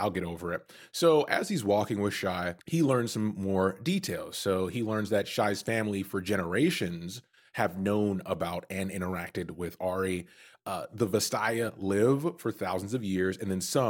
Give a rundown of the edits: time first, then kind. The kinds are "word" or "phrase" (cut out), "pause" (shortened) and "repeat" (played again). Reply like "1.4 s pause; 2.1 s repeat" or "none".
2.6 s pause